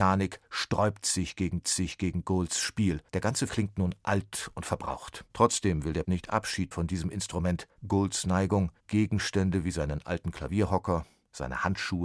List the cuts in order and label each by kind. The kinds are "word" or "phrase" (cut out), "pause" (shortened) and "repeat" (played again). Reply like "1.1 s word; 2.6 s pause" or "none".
1.6 s repeat; 3.1 s pause; 3.5 s word; 5.3 s pause; 6.0 s word; 6.7 s word; 7.8 s pause; 8.8 s pause